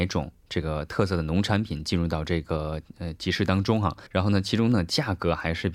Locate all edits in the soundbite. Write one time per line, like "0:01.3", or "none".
0:04.1